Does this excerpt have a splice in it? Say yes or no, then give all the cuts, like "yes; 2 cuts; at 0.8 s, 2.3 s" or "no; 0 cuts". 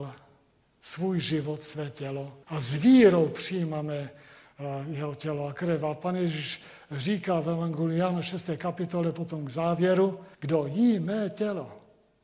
yes; 2 cuts; at 2.4 s, 10.3 s